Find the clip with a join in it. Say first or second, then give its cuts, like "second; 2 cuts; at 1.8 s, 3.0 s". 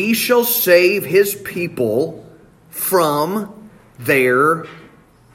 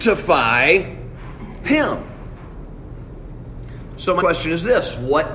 second; 2 cuts; at 1.6 s, 4.2 s